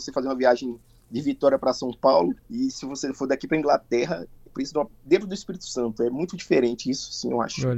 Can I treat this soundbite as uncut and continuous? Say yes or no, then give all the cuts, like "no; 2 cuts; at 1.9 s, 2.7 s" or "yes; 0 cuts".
no; 3 cuts; at 2.4 s, 4.5 s, 4.9 s